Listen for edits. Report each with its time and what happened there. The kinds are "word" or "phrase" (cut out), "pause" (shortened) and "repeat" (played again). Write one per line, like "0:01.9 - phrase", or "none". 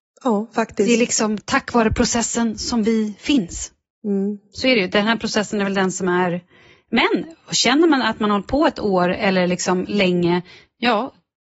none